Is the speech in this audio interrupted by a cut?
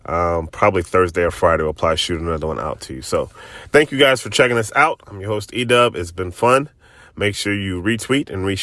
no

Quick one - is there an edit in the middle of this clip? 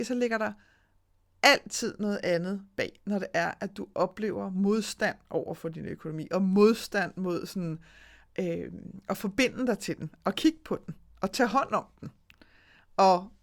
no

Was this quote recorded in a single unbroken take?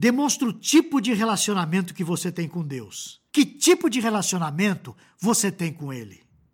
no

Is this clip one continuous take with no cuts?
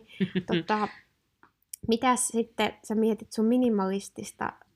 yes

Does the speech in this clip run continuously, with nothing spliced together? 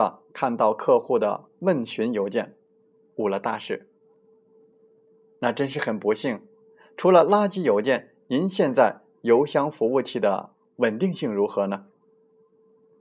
yes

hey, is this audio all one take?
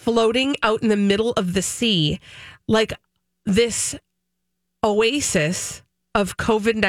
yes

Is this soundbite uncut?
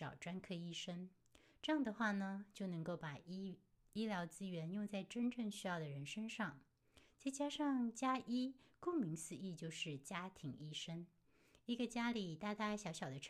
no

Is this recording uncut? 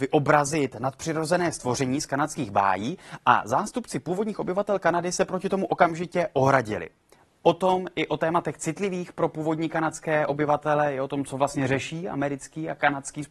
yes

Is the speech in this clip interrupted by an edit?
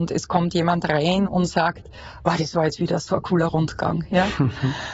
no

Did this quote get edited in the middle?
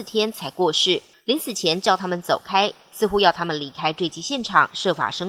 yes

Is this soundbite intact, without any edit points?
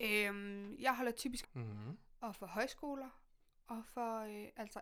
no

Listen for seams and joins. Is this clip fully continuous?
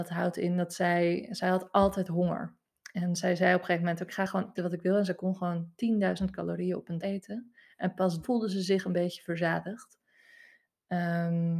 no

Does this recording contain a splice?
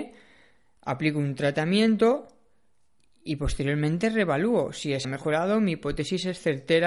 yes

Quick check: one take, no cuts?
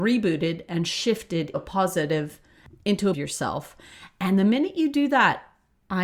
no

